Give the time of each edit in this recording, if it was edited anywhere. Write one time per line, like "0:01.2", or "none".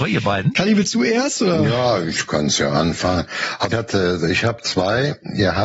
0:03.7